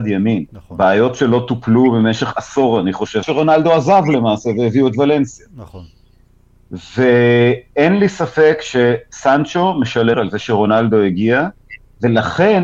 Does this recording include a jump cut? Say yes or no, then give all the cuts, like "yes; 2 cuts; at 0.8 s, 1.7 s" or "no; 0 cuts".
yes; 2 cuts; at 3.2 s, 10.1 s